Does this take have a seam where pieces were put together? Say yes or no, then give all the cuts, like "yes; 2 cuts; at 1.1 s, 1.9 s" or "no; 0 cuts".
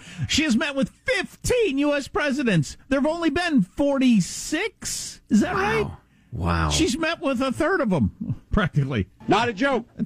no; 0 cuts